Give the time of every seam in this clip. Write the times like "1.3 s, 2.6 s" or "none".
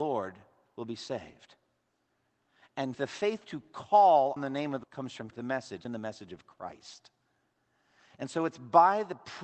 2.9 s, 4.4 s, 4.8 s, 5.3 s, 5.8 s